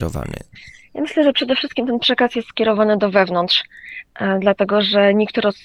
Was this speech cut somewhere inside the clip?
no; 0 cuts

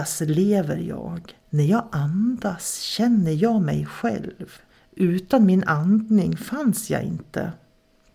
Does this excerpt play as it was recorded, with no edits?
no; 2 cuts; at 1.4 s, 4.7 s

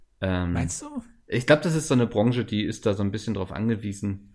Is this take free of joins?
yes; 0 cuts

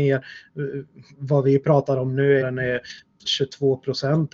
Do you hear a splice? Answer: yes; 2 cuts; at 2.4 s, 3.3 s

